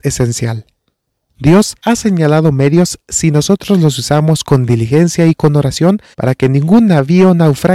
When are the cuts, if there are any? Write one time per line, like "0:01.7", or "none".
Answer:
0:01.8
0:06.1